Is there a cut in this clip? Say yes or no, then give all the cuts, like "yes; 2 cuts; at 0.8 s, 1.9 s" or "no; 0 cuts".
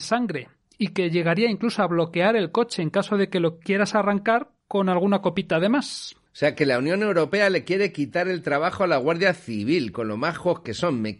yes; 1 cut; at 6.3 s